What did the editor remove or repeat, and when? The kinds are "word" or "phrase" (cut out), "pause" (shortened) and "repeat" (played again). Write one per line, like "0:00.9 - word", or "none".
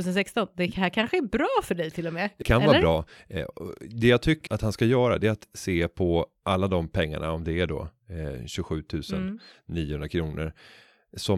0:02.4 - word
0:04.5 - word